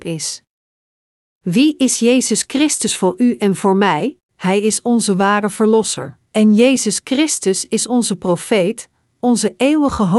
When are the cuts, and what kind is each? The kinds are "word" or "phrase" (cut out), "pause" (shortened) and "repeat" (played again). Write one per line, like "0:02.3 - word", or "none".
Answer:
0:04.2 - pause
0:06.3 - pause